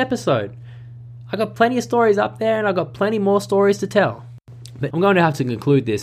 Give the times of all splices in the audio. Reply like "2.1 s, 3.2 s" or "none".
4.9 s